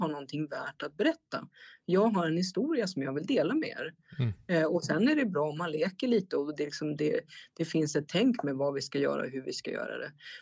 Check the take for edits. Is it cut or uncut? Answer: uncut